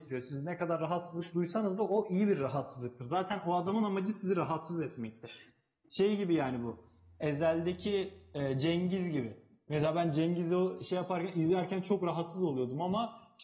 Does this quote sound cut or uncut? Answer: uncut